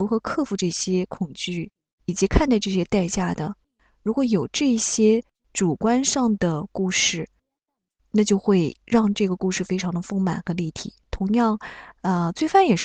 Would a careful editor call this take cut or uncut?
uncut